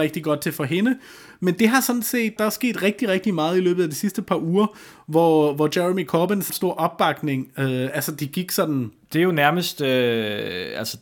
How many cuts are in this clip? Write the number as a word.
two